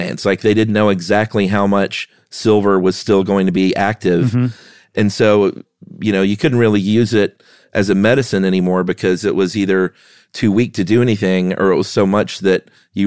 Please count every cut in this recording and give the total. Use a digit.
0